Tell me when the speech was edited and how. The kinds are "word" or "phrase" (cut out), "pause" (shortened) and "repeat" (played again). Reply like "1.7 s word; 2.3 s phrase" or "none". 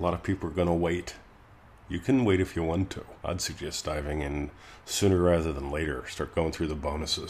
3.2 s pause